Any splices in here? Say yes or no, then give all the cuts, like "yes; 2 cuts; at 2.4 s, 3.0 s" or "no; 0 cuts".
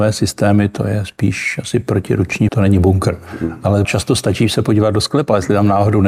yes; 2 cuts; at 2.5 s, 3.8 s